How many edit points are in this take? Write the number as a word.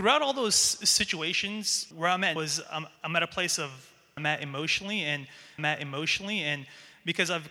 five